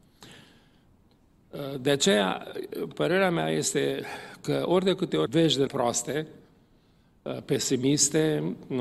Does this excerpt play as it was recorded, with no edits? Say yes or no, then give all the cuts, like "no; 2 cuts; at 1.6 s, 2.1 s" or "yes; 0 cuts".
no; 2 cuts; at 5.3 s, 5.7 s